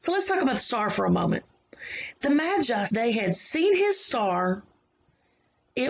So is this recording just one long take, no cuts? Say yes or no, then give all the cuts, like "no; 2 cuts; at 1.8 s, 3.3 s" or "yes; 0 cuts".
no; 1 cut; at 2.9 s